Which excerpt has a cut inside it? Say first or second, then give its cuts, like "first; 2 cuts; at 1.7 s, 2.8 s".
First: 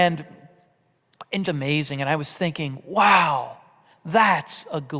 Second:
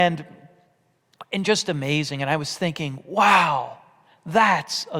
first; 1 cut; at 1.4 s